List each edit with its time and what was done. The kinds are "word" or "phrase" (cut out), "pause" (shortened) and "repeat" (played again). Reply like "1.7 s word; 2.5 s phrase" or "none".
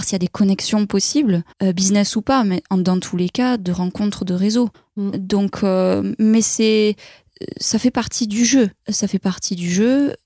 1.5 s pause; 4.7 s pause; 8.8 s pause